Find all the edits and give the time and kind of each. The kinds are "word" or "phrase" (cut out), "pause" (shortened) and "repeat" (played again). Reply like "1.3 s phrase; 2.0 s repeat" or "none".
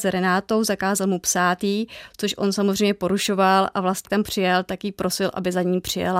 4.0 s phrase